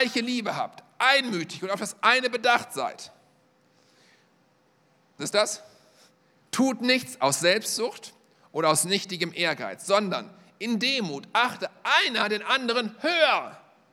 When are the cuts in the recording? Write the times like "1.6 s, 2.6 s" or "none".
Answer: 5.2 s